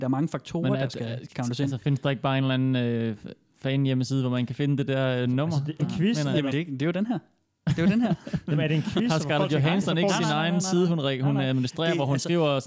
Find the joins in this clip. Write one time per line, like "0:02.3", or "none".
0:05.8
0:06.5